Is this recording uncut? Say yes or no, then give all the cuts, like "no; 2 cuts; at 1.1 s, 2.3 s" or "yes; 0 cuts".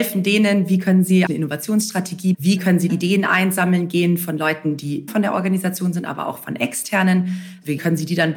no; 4 cuts; at 1.3 s, 2.3 s, 2.9 s, 5.1 s